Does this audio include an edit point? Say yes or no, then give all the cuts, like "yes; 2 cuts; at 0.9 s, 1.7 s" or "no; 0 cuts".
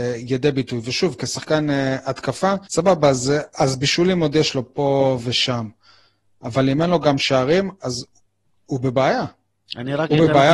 yes; 1 cut; at 2.6 s